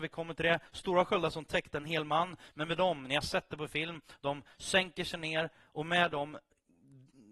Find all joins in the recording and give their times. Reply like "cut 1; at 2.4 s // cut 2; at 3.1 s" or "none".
none